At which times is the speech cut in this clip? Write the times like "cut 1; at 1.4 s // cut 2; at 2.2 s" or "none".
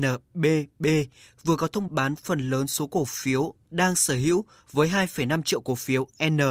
cut 1; at 1.9 s

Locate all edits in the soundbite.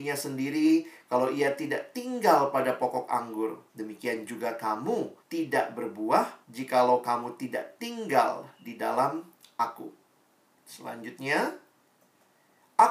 cut 1; at 3.7 s // cut 2; at 5.2 s // cut 3; at 6.4 s // cut 4; at 10.4 s

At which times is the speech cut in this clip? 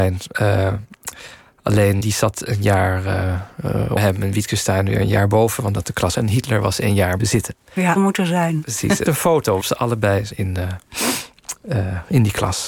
cut 1; at 2.0 s // cut 2; at 4.0 s // cut 3; at 5.7 s // cut 4; at 6.1 s // cut 5; at 7.2 s // cut 6; at 8.0 s // cut 7; at 9.1 s // cut 8; at 9.6 s // cut 9; at 10.3 s

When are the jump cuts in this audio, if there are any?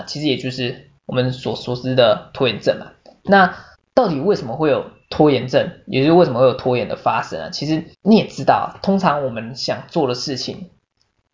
cut 1; at 1.0 s // cut 2; at 3.7 s // cut 3; at 5.0 s // cut 4; at 7.9 s

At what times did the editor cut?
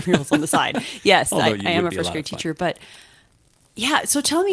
none

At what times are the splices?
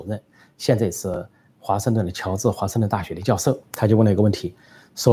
cut 1; at 3.6 s

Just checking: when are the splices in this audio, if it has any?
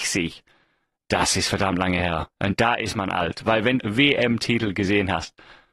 cut 1; at 2.3 s // cut 2; at 3.8 s

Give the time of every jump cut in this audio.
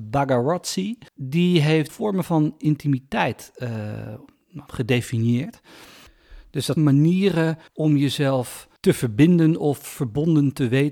cut 1; at 1.1 s // cut 2; at 1.9 s // cut 3; at 4.7 s // cut 4; at 6.8 s // cut 5; at 7.7 s // cut 6; at 8.8 s

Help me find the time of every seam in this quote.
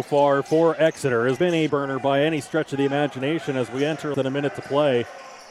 cut 1; at 1.4 s // cut 2; at 1.7 s // cut 3; at 4.1 s

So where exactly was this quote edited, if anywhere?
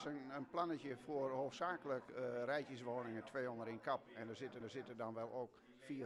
cut 1; at 4.6 s

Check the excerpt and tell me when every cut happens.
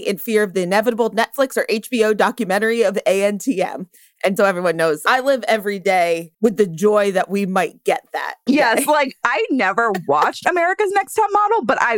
cut 1; at 4.4 s // cut 2; at 6.3 s // cut 3; at 8.5 s

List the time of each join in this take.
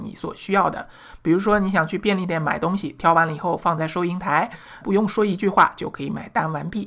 cut 1; at 4.8 s

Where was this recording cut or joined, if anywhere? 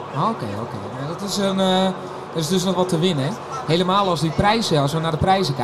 cut 1; at 2.8 s

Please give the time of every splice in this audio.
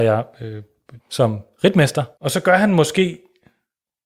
cut 1; at 1.0 s // cut 2; at 2.1 s

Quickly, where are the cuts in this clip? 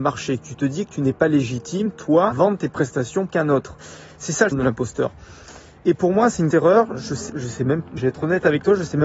cut 1; at 2.3 s // cut 2; at 3.3 s // cut 3; at 4.5 s // cut 4; at 6.5 s // cut 5; at 7.3 s // cut 6; at 8.0 s

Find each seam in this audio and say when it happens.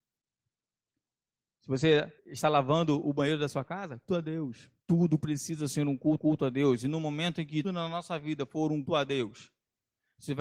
cut 1; at 2.2 s // cut 2; at 4.1 s // cut 3; at 4.8 s // cut 4; at 6.2 s // cut 5; at 7.6 s // cut 6; at 8.9 s

